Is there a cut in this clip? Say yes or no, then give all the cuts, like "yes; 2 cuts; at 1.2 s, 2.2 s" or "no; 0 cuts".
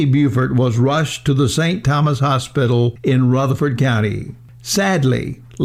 no; 0 cuts